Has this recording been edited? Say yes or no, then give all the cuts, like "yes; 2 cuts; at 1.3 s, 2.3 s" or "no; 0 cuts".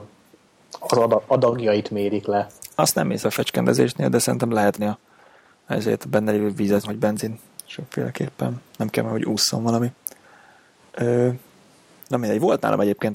yes; 3 cuts; at 3.2 s, 4.8 s, 6.8 s